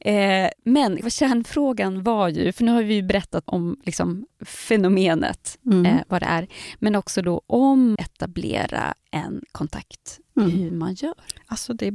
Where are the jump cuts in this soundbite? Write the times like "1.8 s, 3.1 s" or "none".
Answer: 1.0 s, 3.5 s, 8.0 s